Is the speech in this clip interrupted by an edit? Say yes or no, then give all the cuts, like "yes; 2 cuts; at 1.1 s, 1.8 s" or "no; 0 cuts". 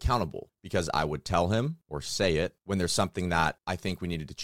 no; 0 cuts